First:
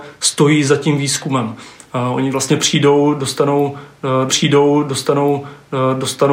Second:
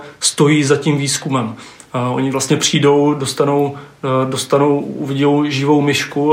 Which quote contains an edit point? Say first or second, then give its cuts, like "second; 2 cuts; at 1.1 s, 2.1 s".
first; 1 cut; at 4.3 s